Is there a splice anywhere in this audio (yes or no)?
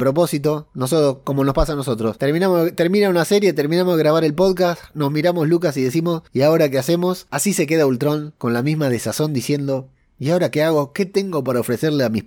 no